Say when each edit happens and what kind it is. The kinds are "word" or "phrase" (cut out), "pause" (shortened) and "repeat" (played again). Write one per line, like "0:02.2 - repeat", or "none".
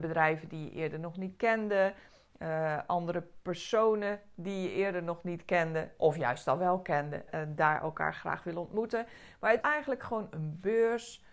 0:07.3 - word
0:09.6 - word

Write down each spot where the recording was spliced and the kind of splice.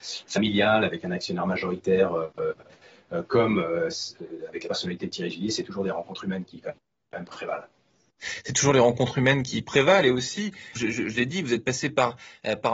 0:10.7 - word

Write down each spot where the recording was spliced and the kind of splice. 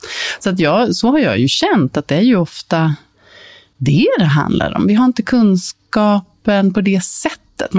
none

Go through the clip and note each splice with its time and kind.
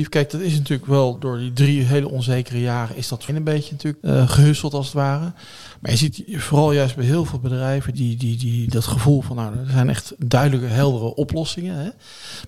0:01.2 - word
0:03.3 - word
0:04.0 - word
0:07.9 - word

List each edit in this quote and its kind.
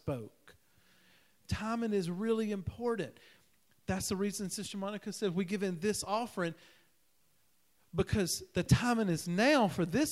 none

